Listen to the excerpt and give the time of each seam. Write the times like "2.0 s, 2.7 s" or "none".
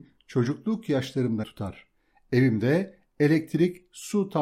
1.4 s